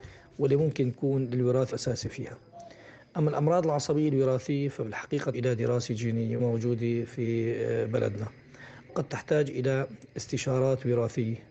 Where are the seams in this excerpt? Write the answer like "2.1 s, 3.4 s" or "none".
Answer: 1.7 s, 5.3 s, 6.4 s, 8.9 s